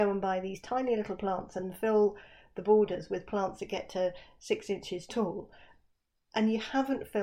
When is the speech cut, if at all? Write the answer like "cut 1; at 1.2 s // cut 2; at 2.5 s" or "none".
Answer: none

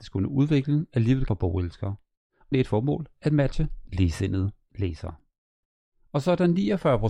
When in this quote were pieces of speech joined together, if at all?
cut 1; at 1.3 s // cut 2; at 2.5 s

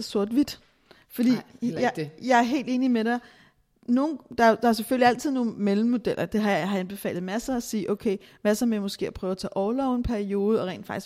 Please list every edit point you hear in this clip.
none

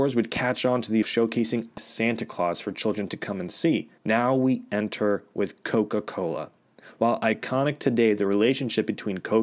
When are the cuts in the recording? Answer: cut 1; at 1.0 s // cut 2; at 1.8 s // cut 3; at 4.0 s

